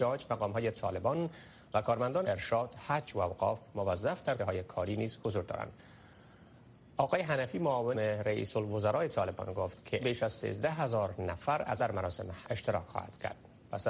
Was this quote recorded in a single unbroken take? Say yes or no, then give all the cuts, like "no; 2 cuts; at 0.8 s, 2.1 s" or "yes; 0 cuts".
no; 6 cuts; at 2.2 s, 4.4 s, 7.9 s, 10.0 s, 11.8 s, 12.4 s